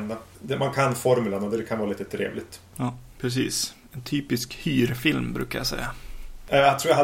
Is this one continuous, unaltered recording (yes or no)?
yes